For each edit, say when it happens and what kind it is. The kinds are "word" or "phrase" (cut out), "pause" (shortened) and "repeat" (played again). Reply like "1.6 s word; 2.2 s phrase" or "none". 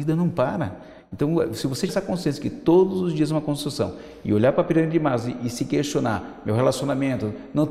1.9 s word